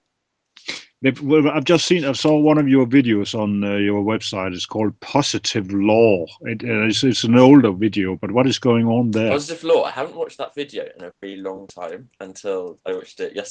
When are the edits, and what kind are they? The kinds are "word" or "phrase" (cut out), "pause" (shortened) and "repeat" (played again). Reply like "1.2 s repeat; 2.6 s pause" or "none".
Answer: 11.1 s word